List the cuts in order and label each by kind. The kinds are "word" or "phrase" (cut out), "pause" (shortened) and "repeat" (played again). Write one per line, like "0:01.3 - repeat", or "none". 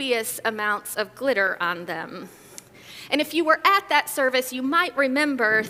none